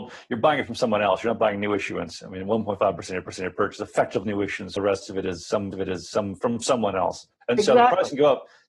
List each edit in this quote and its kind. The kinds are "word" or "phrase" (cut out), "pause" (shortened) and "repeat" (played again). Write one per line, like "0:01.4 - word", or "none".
0:03.3 - repeat
0:04.2 - word
0:04.8 - word
0:05.7 - repeat
0:07.4 - pause